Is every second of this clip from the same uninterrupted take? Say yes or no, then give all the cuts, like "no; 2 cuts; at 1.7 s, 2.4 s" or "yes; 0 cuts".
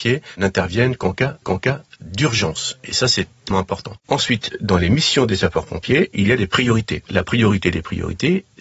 no; 4 cuts; at 1.4 s, 3.5 s, 4.0 s, 7.1 s